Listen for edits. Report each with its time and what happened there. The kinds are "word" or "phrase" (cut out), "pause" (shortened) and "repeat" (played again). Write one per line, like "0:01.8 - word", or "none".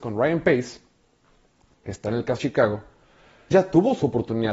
0:02.4 - word
0:03.5 - word